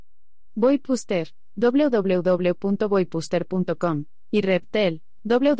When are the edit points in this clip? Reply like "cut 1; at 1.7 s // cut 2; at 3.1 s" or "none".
none